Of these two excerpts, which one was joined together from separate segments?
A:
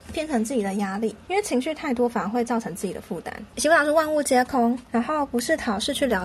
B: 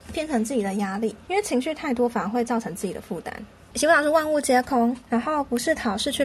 A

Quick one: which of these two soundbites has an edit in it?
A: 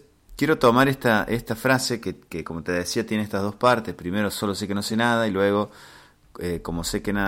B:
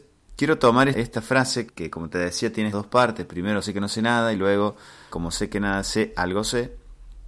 B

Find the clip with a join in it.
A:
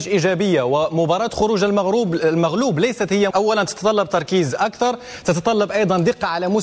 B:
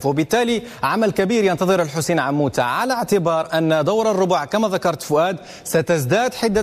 A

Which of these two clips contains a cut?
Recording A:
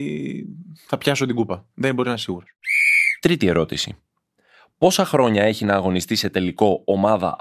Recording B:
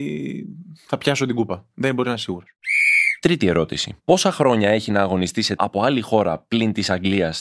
B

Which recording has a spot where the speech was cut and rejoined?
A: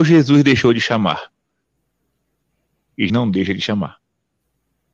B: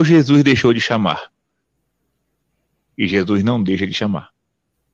A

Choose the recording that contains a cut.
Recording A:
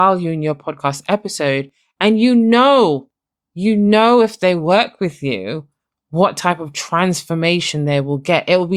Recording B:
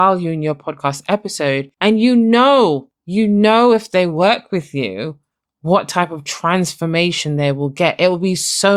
B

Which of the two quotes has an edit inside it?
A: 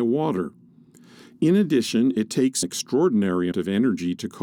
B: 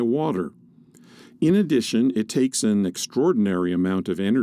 A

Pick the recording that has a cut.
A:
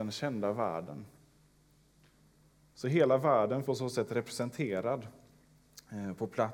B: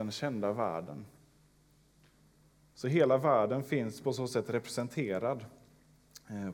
A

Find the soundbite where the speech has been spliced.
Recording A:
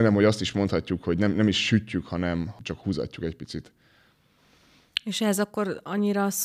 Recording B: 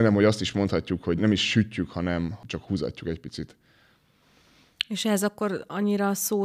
B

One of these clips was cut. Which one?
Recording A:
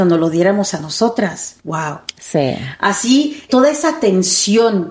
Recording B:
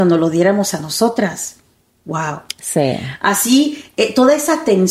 A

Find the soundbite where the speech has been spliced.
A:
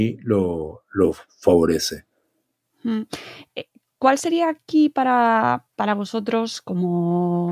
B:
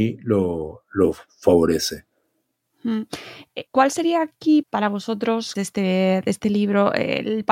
B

